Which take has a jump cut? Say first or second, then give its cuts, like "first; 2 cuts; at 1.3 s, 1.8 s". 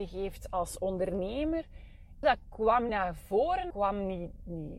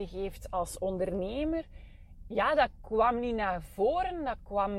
first; 3 cuts; at 2.2 s, 2.9 s, 3.7 s